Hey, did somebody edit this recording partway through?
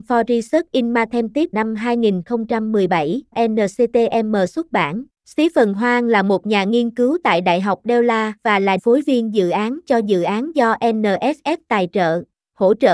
yes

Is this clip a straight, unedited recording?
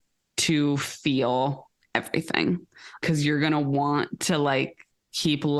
yes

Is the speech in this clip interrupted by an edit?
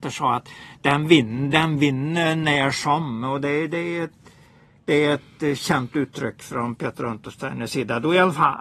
no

